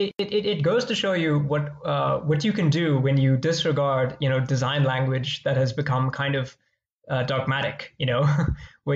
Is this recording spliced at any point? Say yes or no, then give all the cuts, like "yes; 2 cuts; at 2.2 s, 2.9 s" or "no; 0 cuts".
no; 0 cuts